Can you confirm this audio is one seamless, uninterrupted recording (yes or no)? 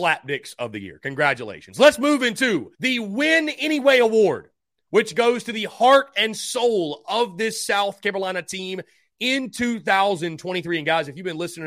no